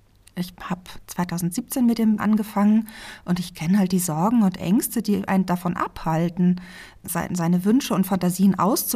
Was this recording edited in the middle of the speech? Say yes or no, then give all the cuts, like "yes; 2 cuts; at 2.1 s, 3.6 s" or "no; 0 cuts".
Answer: yes; 1 cut; at 2.2 s